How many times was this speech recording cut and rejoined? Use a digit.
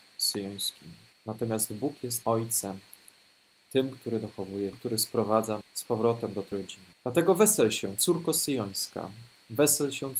6